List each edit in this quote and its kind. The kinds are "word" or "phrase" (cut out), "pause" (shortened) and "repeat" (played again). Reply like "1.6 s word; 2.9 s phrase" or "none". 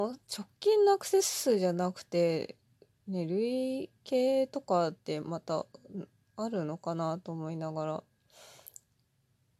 none